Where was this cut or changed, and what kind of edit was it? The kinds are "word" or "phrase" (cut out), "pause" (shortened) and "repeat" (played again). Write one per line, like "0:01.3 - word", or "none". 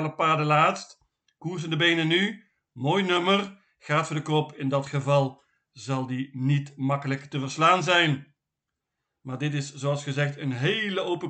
none